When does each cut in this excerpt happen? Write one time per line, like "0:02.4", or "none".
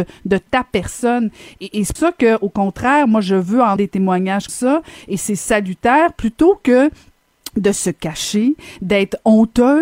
0:02.0
0:03.8
0:04.5